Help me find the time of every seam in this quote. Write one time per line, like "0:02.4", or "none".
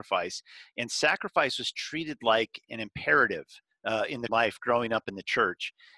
0:04.3